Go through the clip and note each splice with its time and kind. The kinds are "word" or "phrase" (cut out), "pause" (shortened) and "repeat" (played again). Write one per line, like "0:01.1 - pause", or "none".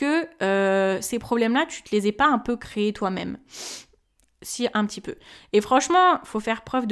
none